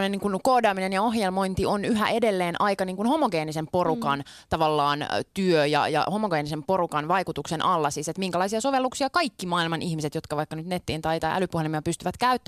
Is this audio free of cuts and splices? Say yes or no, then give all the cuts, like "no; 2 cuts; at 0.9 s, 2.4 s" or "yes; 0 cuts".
yes; 0 cuts